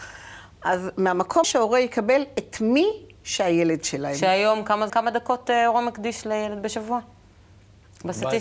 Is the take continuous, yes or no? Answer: no